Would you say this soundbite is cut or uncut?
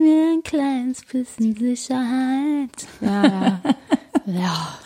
uncut